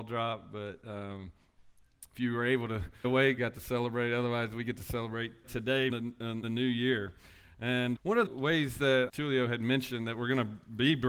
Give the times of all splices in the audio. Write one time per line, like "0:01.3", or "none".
0:02.1
0:03.0
0:03.4
0:05.4
0:05.9
0:06.4
0:07.9
0:08.3
0:09.1